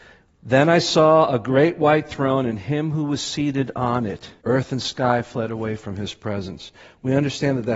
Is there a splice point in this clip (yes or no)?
yes